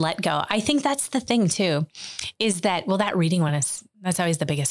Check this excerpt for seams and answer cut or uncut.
uncut